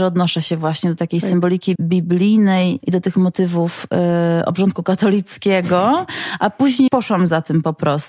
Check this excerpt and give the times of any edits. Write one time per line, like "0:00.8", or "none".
0:01.0
0:01.7
0:02.8
0:06.9